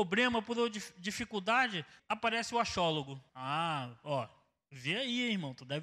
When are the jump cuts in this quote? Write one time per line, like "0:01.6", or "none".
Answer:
0:02.0
0:03.3